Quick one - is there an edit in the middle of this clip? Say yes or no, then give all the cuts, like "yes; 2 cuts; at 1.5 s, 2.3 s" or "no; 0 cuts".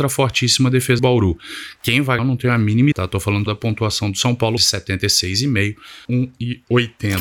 yes; 6 cuts; at 1.0 s, 2.2 s, 2.9 s, 3.5 s, 4.6 s, 6.0 s